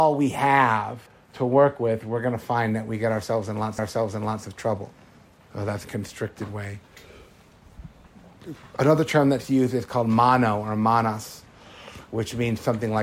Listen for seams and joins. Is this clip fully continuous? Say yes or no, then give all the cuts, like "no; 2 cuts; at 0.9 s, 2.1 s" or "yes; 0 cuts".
no; 4 cuts; at 1.1 s, 3.8 s, 5.3 s, 5.8 s